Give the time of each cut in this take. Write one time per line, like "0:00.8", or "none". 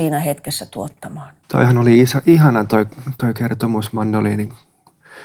0:01.4